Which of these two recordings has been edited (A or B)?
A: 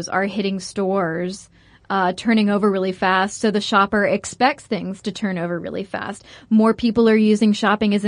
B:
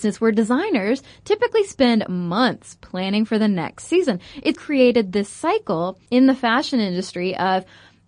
B